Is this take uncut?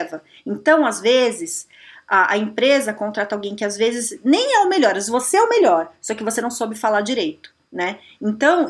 yes; 0 cuts

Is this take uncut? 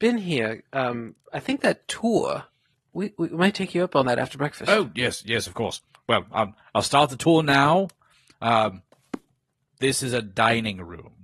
yes; 0 cuts

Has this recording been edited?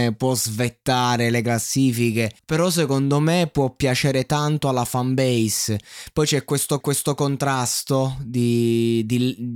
yes; 2 cuts; at 2.4 s, 6.8 s

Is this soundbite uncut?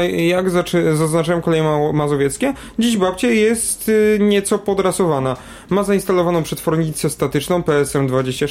yes; 0 cuts

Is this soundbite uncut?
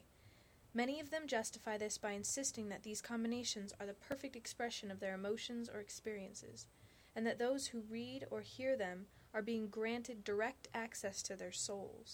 yes; 0 cuts

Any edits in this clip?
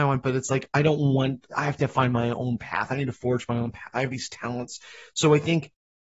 no; 0 cuts

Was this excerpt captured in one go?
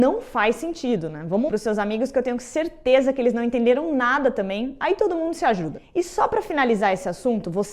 no; 1 cut; at 1.5 s

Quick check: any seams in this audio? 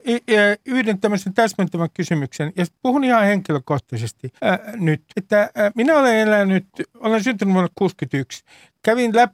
yes; 2 cuts; at 4.4 s, 5.1 s

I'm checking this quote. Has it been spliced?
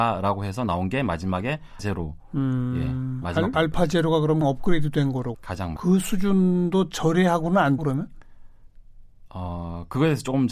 yes; 6 cuts; at 1.8 s, 3.5 s, 4.4 s, 5.3 s, 5.8 s, 7.8 s

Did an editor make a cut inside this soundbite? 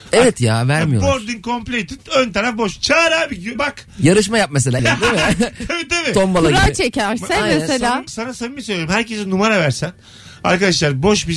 yes; 3 cuts; at 3.5 s, 4.8 s, 8.1 s

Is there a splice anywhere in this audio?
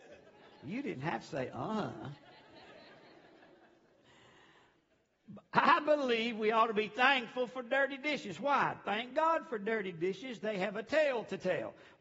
no; 0 cuts

